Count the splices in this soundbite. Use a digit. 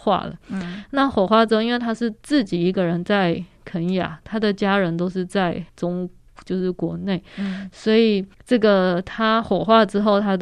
2